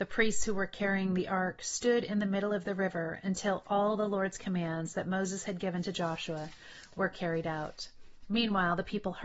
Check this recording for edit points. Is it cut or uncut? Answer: uncut